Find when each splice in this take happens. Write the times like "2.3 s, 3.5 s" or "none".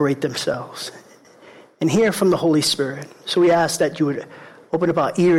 none